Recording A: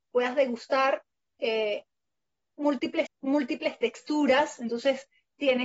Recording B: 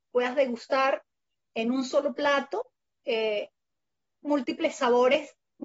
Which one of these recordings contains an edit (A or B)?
A